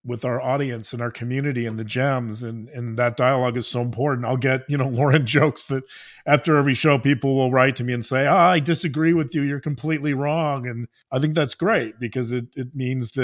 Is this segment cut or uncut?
uncut